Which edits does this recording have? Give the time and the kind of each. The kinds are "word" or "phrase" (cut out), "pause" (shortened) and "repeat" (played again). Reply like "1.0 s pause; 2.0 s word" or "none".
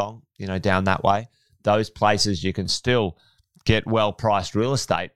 none